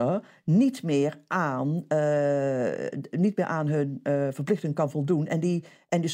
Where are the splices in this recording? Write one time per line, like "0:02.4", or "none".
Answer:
none